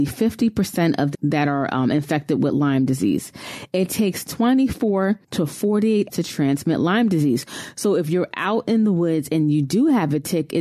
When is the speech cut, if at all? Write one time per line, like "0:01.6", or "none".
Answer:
0:01.1
0:05.2
0:06.1